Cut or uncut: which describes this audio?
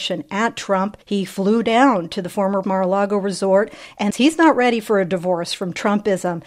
cut